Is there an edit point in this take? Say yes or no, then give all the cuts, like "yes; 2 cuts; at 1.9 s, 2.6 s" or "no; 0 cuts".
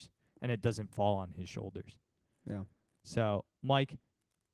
no; 0 cuts